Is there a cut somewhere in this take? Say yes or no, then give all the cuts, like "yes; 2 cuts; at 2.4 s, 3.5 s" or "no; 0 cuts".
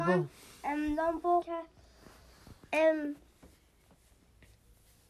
yes; 1 cut; at 1.4 s